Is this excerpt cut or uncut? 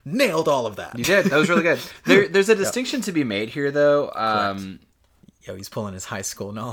uncut